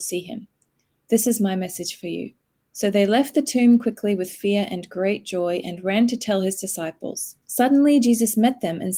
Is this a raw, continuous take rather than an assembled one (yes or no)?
no